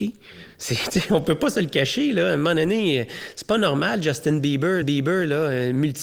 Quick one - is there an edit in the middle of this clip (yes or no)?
yes